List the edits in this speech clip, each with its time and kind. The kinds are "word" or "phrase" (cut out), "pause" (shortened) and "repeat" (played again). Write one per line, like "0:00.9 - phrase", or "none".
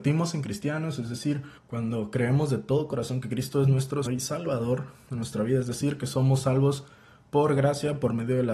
0:01.6 - pause
0:04.1 - word